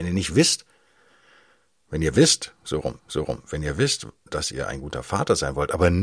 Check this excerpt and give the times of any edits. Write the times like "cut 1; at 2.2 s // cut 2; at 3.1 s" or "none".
cut 1; at 3.0 s